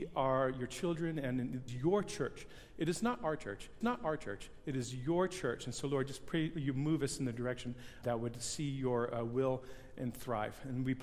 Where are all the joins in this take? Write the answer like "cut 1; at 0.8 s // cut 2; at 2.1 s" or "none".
cut 1; at 1.7 s // cut 2; at 3.8 s // cut 3; at 8.0 s // cut 4; at 10.0 s